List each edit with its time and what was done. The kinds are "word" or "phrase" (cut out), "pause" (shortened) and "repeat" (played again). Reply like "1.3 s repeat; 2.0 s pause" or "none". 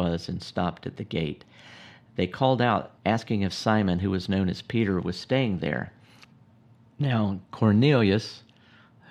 3.0 s pause